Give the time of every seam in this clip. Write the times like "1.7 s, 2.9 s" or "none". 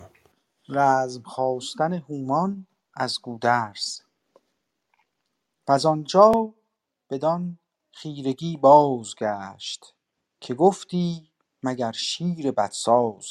none